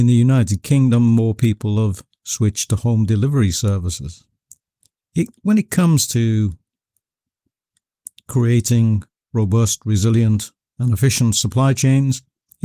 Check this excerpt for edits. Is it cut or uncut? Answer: uncut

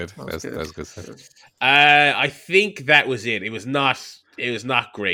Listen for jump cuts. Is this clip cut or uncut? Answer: uncut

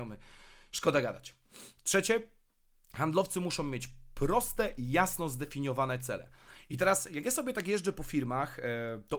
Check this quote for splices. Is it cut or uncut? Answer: uncut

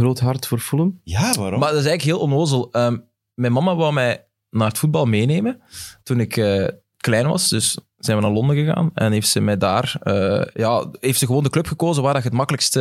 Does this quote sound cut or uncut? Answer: uncut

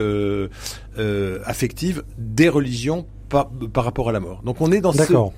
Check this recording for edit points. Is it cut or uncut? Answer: uncut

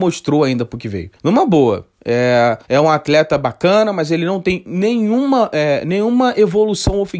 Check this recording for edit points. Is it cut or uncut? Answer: cut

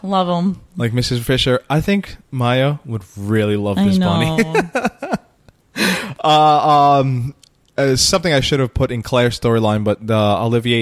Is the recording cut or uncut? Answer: cut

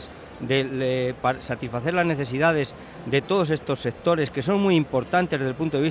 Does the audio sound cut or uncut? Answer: uncut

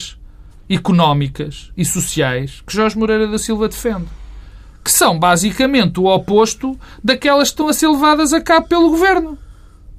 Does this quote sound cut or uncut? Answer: uncut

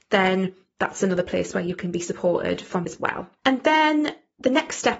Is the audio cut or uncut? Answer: cut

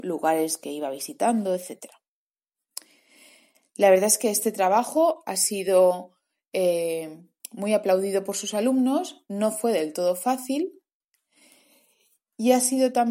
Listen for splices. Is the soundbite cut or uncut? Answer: uncut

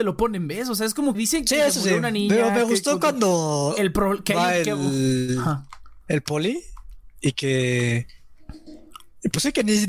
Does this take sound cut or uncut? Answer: cut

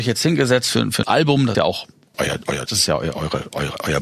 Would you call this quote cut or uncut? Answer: cut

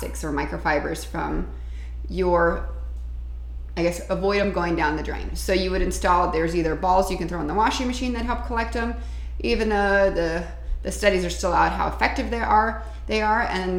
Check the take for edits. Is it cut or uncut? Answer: uncut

